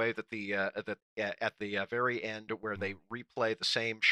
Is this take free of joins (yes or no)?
no